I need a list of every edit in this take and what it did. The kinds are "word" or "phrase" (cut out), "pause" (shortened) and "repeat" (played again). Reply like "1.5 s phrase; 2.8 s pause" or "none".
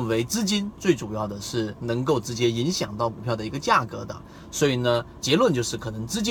5.2 s word